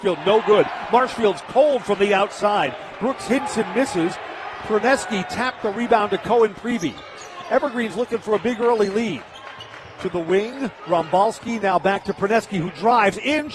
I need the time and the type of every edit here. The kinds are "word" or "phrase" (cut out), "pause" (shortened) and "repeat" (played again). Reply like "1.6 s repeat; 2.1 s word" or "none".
none